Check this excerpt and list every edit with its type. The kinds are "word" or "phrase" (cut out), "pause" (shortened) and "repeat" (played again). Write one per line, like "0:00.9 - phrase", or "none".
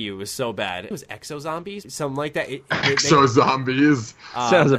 0:00.9 - phrase
0:01.8 - word